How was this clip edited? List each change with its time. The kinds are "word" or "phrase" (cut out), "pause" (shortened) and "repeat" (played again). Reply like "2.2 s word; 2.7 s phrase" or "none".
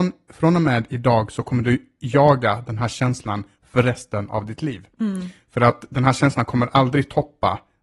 none